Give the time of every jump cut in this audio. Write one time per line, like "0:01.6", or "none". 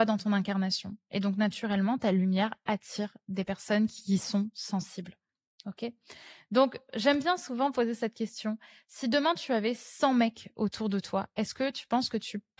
none